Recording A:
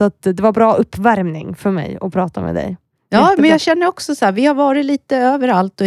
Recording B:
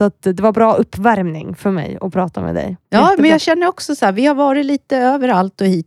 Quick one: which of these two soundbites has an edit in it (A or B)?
B